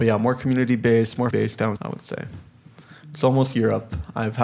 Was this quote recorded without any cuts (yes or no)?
no